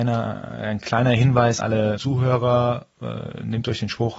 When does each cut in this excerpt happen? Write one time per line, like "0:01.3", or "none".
0:01.6
0:02.0